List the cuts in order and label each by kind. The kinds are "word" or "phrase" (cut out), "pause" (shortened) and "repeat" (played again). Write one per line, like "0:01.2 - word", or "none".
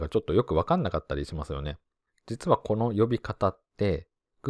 none